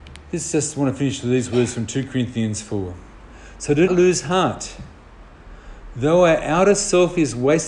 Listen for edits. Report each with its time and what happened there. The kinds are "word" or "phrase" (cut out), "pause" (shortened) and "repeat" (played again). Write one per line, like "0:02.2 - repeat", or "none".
0:03.9 - word